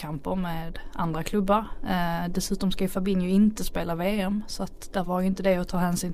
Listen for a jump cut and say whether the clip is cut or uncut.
uncut